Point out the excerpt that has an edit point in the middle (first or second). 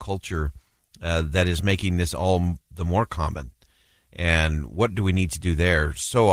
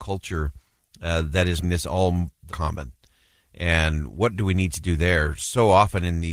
second